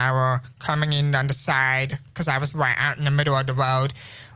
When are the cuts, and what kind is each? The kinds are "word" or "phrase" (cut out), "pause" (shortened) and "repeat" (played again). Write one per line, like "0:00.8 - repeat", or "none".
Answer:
none

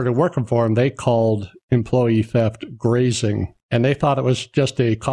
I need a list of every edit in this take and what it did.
0:03.6 - pause

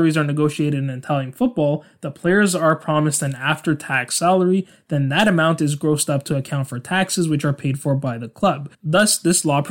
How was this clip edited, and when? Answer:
0:08.7 - pause

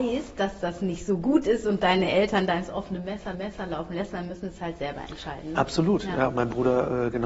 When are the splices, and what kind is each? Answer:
0:03.3 - repeat

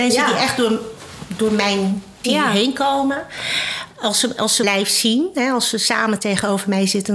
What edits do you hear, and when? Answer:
0:02.2 - word
0:04.6 - word

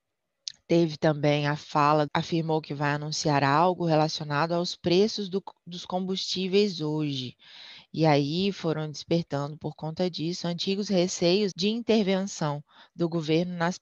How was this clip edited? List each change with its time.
0:02.1 - phrase
0:11.5 - word

